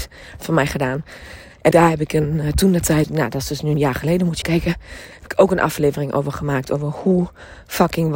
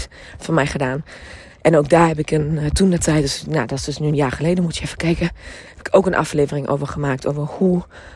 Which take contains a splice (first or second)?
first